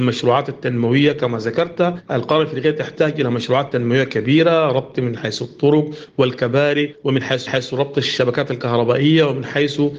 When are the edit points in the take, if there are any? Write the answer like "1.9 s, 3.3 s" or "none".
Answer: 5.2 s, 7.5 s